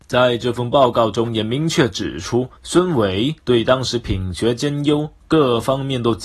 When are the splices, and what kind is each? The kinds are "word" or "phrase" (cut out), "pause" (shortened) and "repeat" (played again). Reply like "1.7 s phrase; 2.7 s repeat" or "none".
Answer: 2.6 s pause; 3.4 s pause